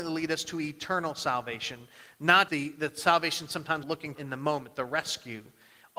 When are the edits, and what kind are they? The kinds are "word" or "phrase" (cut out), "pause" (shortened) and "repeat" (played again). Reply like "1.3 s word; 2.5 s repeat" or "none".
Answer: 2.5 s word; 3.8 s word; 4.1 s word